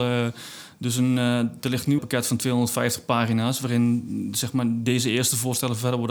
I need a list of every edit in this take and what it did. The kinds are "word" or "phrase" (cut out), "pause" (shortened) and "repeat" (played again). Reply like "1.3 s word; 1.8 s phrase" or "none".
2.0 s phrase